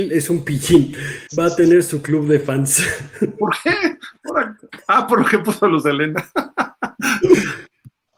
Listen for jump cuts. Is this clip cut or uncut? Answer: cut